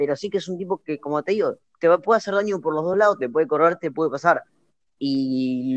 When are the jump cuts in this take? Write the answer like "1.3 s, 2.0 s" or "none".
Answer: none